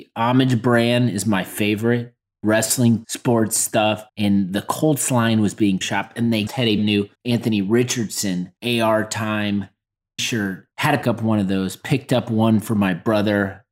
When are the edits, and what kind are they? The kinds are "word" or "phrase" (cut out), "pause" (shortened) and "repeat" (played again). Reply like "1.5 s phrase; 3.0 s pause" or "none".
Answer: 3.0 s word; 4.1 s pause; 5.8 s phrase; 6.5 s word; 6.8 s word; 7.1 s pause; 8.6 s pause; 10.2 s word; 11.0 s word